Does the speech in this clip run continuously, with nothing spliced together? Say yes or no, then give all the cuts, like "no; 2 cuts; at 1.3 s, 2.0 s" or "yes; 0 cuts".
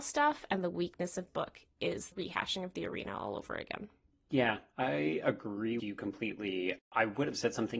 no; 3 cuts; at 1.3 s, 2.1 s, 5.8 s